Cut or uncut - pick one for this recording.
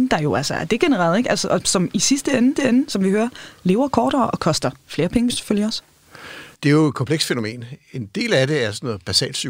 cut